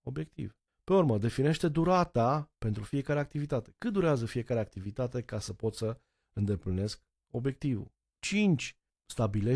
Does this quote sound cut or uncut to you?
uncut